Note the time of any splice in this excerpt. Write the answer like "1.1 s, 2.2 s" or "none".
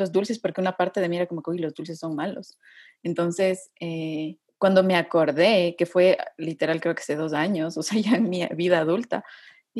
none